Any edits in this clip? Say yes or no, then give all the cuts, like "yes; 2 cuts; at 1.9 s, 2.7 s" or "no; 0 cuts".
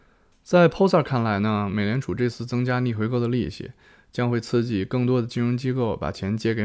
no; 0 cuts